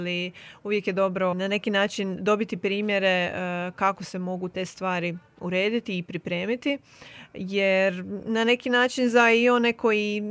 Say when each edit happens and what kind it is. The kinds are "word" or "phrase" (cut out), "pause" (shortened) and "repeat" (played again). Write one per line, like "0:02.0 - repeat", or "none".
0:01.3 - word